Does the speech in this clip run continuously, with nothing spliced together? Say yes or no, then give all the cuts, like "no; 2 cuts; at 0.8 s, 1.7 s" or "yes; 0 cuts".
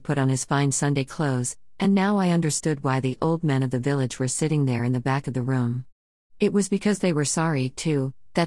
yes; 0 cuts